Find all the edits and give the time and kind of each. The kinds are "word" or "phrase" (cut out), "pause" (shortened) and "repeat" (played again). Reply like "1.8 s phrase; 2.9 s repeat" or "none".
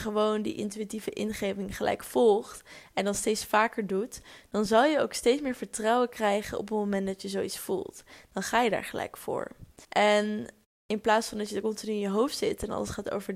9.8 s pause